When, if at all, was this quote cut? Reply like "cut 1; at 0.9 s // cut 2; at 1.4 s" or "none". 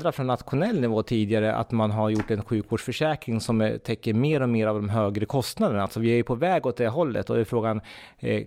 none